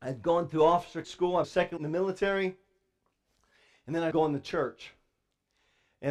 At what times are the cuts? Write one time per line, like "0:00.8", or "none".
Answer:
0:01.0
0:01.4
0:01.8
0:04.1